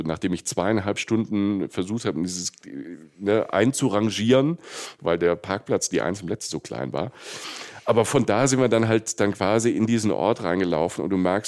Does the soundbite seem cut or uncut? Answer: uncut